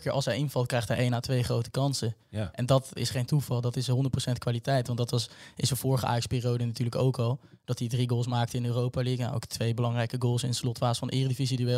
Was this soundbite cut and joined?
no; 0 cuts

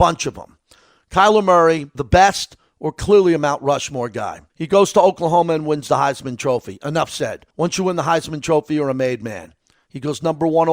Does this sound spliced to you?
yes; 3 cuts; at 1.9 s, 4.5 s, 7.5 s

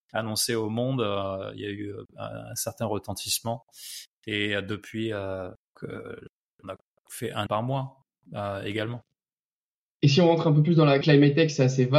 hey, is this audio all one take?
no; 3 cuts; at 5.8 s, 7.5 s, 11.0 s

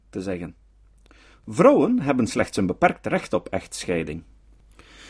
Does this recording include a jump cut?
no; 0 cuts

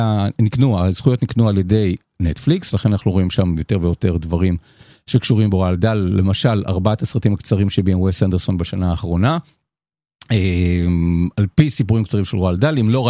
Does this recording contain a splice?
no; 0 cuts

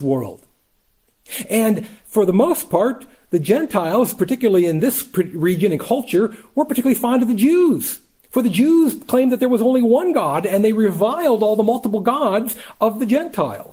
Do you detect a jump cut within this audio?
no; 0 cuts

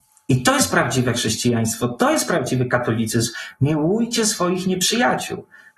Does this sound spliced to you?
no; 0 cuts

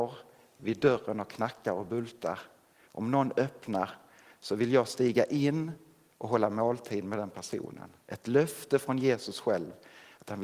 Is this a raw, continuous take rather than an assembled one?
yes; 0 cuts

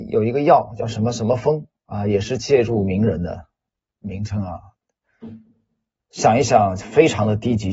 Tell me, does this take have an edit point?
no; 0 cuts

